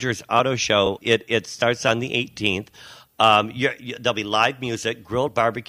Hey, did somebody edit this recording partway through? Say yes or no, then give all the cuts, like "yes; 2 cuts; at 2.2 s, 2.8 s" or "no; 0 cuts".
yes; 1 cut; at 1.0 s